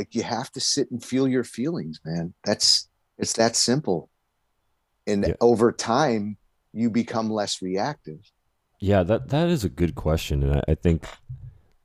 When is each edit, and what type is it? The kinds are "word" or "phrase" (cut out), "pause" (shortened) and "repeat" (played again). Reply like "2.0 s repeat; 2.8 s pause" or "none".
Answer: 8.7 s word